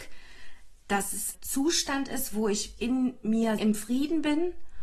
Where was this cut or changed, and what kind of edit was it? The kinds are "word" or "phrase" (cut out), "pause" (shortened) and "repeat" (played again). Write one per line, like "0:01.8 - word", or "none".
0:01.3 - word
0:02.8 - word
0:03.6 - word